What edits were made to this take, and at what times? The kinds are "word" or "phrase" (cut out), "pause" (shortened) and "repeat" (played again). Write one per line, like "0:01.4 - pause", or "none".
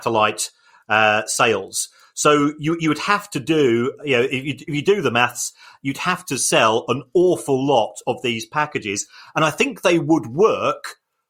none